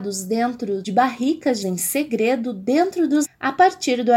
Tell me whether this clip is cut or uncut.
cut